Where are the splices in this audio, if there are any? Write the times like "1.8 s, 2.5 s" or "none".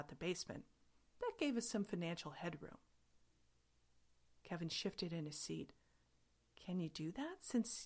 none